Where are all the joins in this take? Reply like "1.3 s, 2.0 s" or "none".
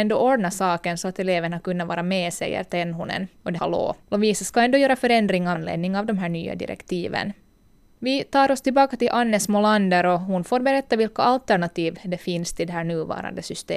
3.6 s, 4.0 s, 5.6 s